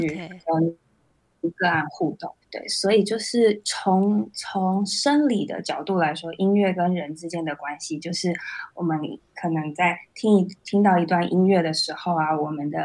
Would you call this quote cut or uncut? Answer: cut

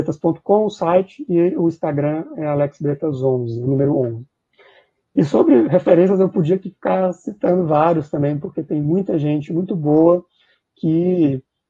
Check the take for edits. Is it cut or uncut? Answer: uncut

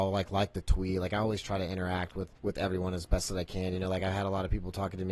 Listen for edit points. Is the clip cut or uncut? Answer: cut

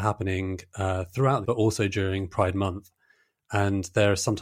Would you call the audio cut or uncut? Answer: cut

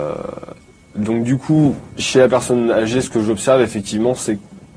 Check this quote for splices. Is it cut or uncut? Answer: uncut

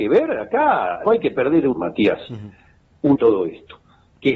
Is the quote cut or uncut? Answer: cut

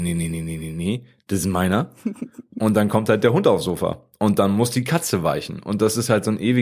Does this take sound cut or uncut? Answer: uncut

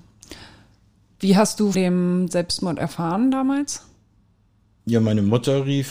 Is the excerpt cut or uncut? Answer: cut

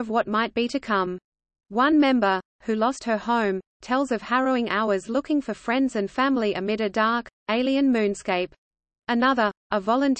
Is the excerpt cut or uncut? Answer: uncut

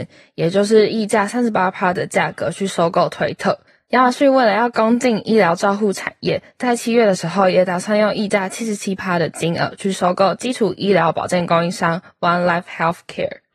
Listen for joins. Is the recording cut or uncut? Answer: cut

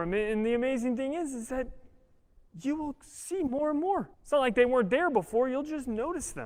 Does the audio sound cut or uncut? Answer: cut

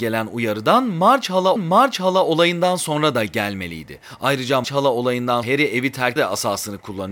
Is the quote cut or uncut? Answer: cut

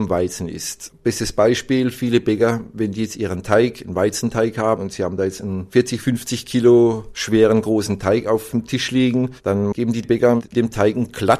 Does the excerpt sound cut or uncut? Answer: uncut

